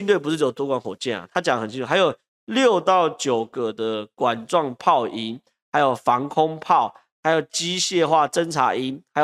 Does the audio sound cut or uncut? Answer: uncut